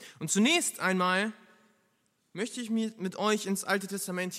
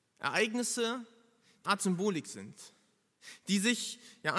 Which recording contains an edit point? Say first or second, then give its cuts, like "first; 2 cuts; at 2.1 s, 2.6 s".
second; 1 cut; at 1.6 s